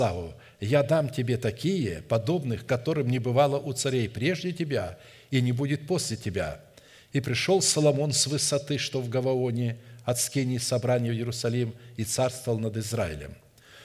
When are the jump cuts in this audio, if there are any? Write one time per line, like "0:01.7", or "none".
none